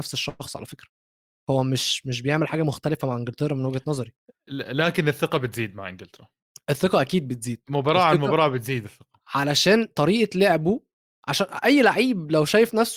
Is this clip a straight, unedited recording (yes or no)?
yes